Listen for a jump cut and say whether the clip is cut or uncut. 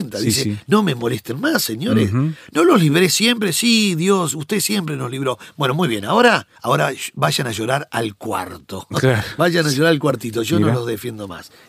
cut